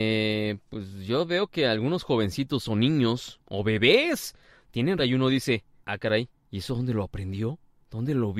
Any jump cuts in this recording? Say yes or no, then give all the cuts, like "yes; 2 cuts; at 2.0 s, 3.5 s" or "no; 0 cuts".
yes; 3 cuts; at 5.0 s, 5.8 s, 6.3 s